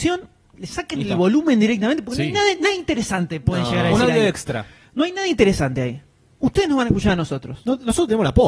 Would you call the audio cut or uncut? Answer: uncut